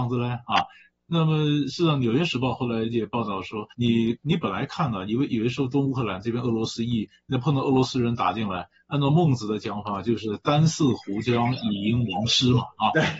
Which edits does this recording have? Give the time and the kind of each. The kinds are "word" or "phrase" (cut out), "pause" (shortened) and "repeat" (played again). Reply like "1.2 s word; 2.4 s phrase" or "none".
3.7 s pause